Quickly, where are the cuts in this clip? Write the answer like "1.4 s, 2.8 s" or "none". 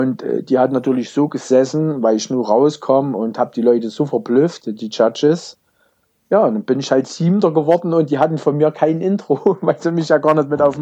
none